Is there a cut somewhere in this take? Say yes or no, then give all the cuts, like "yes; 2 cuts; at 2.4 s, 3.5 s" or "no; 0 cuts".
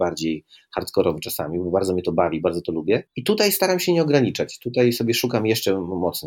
yes; 1 cut; at 3.1 s